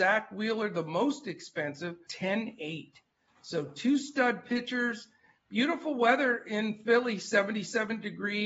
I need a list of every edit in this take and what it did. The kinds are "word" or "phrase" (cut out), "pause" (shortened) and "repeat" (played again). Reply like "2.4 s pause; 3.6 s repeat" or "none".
2.1 s word